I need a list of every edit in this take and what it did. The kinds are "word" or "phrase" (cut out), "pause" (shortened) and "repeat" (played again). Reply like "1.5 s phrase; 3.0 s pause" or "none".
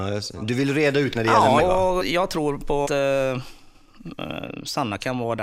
1.2 s word; 1.6 s word; 2.0 s word; 2.9 s word